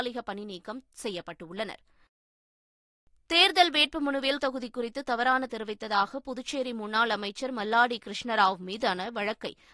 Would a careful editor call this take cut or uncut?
cut